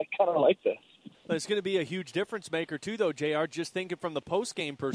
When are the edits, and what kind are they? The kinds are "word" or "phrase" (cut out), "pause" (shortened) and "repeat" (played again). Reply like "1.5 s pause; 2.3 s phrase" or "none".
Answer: 1.1 s pause